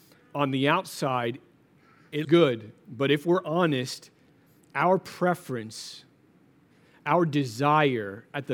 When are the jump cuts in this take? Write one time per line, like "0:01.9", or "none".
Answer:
0:02.2